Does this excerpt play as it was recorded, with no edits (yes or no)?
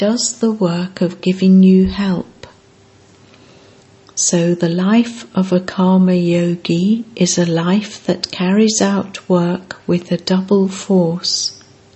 yes